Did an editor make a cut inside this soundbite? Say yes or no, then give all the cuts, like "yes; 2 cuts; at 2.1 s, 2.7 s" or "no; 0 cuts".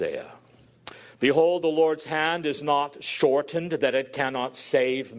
no; 0 cuts